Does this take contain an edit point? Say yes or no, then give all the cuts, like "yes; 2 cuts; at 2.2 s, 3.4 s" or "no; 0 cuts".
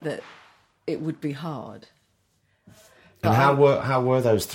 no; 0 cuts